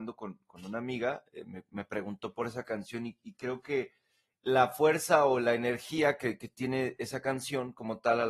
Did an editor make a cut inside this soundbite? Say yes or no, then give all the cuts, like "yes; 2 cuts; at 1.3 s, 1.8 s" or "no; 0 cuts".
no; 0 cuts